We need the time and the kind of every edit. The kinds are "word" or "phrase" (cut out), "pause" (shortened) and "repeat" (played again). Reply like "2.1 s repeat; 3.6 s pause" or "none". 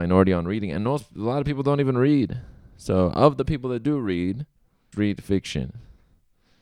4.9 s word